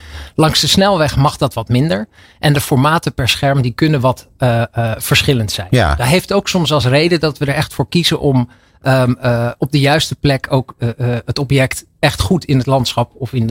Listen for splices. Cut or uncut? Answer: uncut